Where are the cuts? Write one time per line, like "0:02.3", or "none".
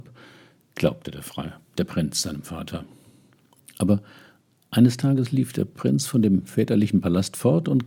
none

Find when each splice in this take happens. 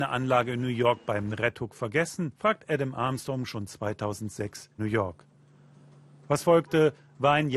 0:01.3
0:02.3
0:04.8

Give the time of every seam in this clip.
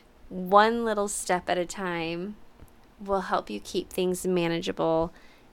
none

